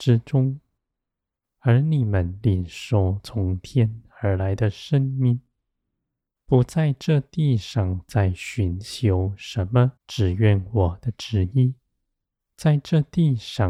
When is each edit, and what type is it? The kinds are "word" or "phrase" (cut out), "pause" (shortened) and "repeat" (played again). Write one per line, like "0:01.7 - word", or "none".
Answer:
0:10.0 - pause

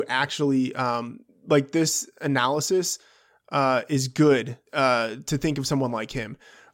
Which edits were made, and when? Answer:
0:04.7 - pause

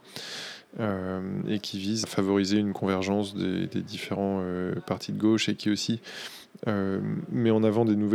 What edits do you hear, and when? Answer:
0:02.0 - phrase

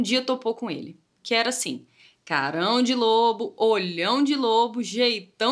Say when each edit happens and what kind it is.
none

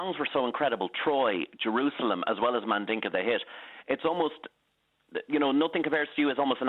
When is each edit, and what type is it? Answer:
none

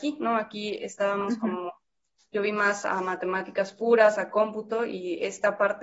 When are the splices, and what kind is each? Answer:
none

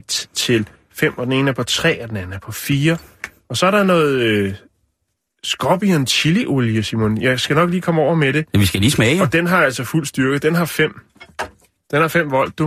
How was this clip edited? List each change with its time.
none

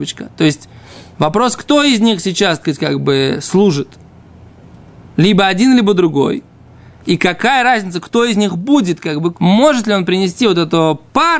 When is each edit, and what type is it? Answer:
0:02.6 - word
0:09.3 - word

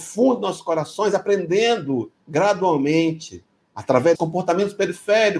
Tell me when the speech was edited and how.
0:02.2 - pause
0:04.1 - word

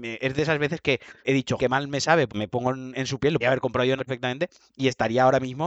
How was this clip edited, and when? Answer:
0:01.2 - word
0:01.6 - word
0:02.3 - word
0:02.9 - word
0:03.4 - word
0:04.0 - word

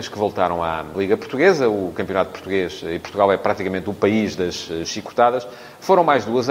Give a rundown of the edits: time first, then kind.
0:00.9 - word

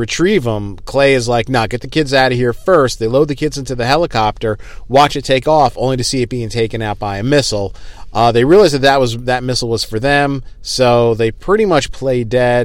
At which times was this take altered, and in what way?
none

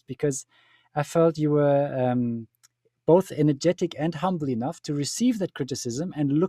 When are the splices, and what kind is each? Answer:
none

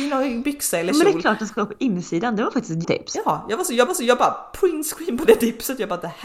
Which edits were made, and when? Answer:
0:02.8 - word
0:03.9 - repeat

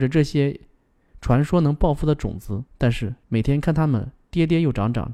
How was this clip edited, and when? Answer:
0:02.7 - pause
0:03.2 - pause

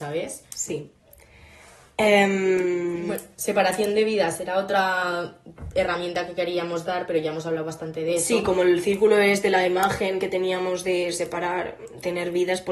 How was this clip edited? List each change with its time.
none

